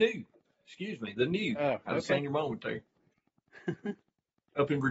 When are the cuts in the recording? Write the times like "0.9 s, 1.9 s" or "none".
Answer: 1.8 s